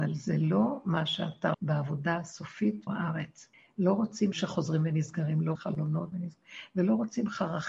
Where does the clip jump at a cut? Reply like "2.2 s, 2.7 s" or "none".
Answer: 1.5 s, 2.9 s, 3.5 s, 4.3 s, 5.5 s, 6.1 s